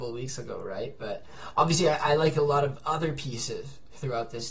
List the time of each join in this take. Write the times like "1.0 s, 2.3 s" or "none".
none